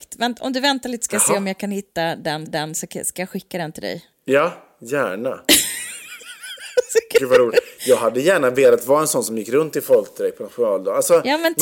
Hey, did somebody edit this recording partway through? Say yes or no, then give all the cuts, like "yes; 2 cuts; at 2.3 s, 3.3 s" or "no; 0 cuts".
yes; 2 cuts; at 2.4 s, 4.1 s